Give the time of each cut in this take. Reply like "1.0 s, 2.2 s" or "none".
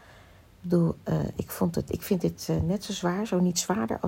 none